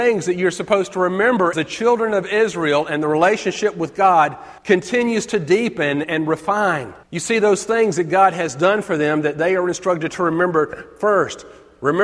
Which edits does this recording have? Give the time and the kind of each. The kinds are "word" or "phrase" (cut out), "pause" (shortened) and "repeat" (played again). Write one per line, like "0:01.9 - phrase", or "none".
0:01.5 - word
0:04.6 - pause
0:06.0 - word
0:07.0 - pause

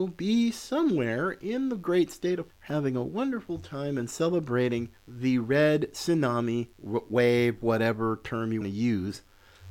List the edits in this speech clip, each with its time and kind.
0:02.5 - word
0:05.0 - pause
0:06.7 - pause
0:08.6 - word

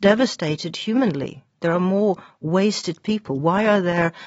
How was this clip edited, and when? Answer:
none

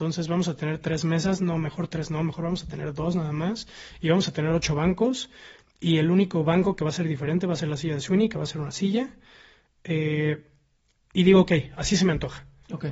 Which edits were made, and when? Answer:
none

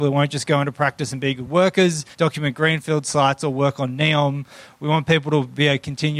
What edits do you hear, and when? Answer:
0:02.1 - pause

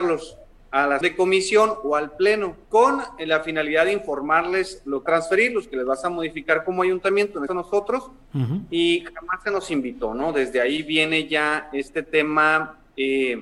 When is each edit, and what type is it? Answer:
0:01.0 - word
0:02.6 - pause
0:05.1 - phrase
0:07.5 - phrase

